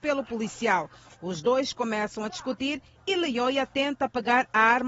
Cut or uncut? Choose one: uncut